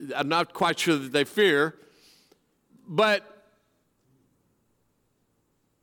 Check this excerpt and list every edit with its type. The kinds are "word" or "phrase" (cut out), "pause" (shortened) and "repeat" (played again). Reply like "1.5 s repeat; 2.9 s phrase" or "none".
none